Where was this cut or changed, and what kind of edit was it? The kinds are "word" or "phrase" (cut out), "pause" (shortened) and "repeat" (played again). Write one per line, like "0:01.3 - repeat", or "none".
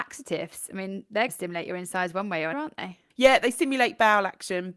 0:01.3 - word
0:02.5 - word